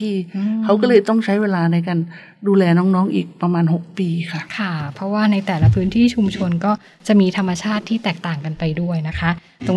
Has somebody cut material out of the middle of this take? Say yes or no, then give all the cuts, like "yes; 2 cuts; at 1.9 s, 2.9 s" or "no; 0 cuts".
no; 0 cuts